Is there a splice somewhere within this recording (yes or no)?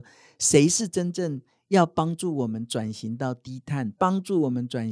no